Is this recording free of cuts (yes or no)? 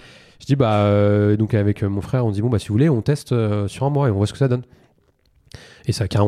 yes